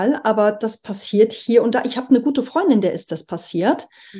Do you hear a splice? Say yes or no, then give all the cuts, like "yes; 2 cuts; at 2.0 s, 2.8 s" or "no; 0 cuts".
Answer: no; 0 cuts